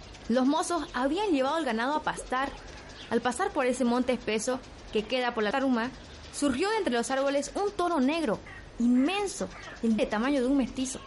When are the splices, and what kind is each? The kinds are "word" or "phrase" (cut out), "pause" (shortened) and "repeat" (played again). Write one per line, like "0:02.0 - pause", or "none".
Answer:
0:05.5 - word
0:10.0 - word